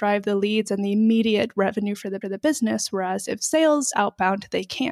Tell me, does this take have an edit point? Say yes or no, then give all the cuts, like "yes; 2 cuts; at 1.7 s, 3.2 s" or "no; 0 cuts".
yes; 2 cuts; at 2.2 s, 3.9 s